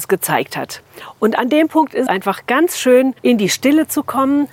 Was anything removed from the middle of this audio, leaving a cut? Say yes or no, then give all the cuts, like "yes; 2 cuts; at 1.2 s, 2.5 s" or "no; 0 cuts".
yes; 2 cuts; at 2.1 s, 3.2 s